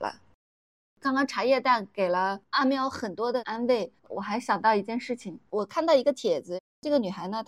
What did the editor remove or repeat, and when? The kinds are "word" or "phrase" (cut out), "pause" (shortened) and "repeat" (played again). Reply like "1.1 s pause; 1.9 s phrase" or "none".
4.0 s pause; 5.5 s pause